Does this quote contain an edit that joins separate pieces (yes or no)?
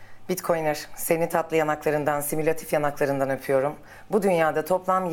no